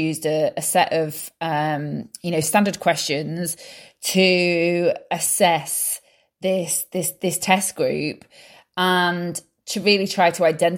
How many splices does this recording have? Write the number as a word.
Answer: zero